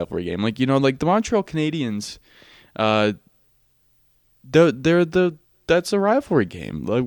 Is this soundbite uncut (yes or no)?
yes